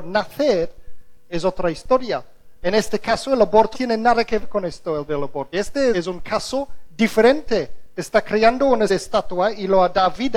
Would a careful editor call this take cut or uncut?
cut